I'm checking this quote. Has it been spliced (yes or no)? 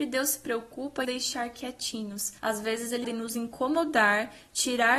yes